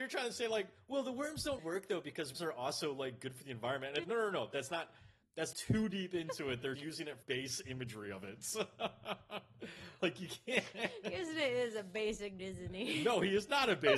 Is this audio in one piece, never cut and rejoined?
no; 8 cuts; at 1.6 s, 2.3 s, 4.0 s, 5.5 s, 6.7 s, 7.2 s, 10.0 s, 12.4 s

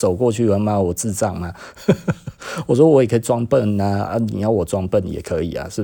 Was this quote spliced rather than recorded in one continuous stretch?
no; 0 cuts

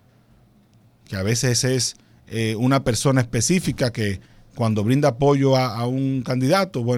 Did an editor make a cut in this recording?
no; 0 cuts

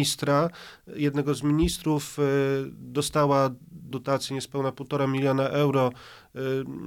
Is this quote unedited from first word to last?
no; 1 cut; at 3.9 s

